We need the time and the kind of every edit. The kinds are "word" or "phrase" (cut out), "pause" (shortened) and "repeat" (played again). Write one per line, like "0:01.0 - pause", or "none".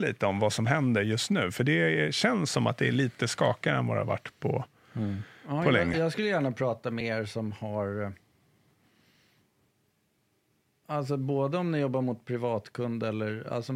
none